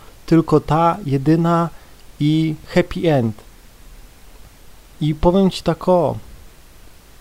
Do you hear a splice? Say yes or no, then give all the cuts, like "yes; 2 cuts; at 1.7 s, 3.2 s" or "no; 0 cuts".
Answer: no; 0 cuts